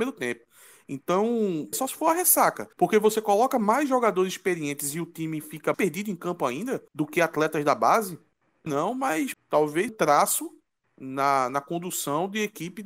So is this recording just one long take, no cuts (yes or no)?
no